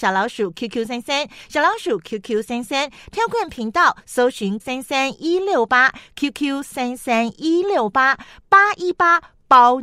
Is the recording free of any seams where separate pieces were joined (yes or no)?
no